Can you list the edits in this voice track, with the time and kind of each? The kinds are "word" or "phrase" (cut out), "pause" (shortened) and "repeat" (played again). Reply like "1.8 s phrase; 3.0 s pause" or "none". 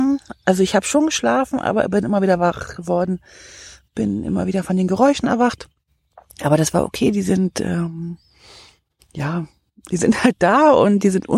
none